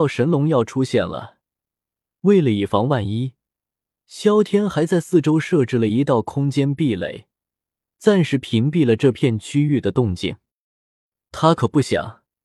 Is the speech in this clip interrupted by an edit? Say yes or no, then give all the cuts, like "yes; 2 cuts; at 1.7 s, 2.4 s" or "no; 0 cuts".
no; 0 cuts